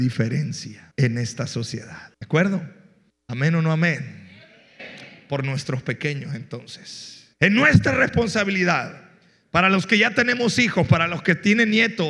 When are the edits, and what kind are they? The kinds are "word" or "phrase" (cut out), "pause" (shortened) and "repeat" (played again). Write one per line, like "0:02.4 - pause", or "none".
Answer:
0:00.9 - pause
0:02.1 - pause
0:03.1 - pause
0:07.3 - pause